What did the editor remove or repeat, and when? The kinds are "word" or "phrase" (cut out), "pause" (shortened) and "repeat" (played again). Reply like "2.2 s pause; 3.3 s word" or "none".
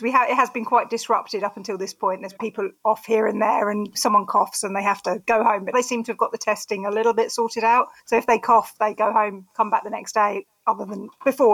2.4 s word; 3.9 s phrase; 5.7 s word; 8.0 s pause